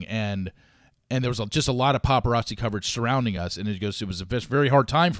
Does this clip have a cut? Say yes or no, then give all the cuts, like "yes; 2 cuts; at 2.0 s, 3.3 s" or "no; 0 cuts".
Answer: no; 0 cuts